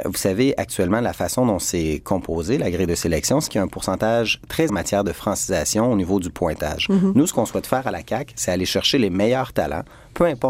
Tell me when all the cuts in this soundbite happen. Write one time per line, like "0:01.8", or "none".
0:03.5
0:04.7